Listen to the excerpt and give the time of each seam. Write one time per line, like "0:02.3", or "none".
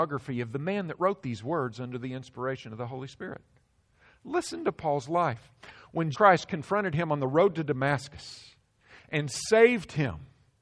0:06.1